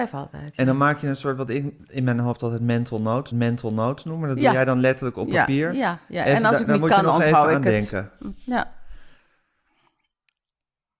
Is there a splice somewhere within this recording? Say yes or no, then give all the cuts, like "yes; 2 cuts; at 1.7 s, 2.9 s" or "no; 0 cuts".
yes; 1 cut; at 3.3 s